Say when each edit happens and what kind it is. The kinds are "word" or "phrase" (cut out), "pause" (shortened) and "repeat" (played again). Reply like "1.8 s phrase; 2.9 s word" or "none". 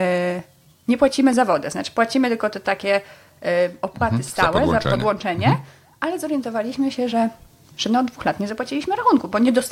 none